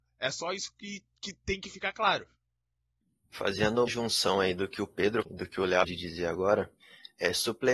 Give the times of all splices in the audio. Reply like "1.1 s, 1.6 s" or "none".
3.9 s, 5.2 s, 5.8 s